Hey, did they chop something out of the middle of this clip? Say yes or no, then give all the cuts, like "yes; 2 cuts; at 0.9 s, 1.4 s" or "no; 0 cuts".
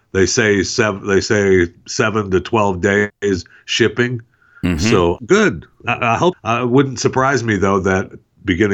yes; 2 cuts; at 5.2 s, 6.3 s